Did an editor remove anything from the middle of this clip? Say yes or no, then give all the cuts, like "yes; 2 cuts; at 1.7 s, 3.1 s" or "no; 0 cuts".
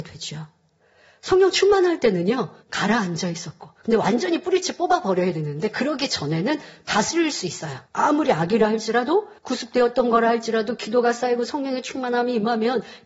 yes; 4 cuts; at 2.6 s, 3.8 s, 7.9 s, 9.4 s